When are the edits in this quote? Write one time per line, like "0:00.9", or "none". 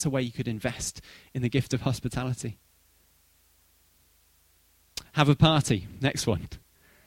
none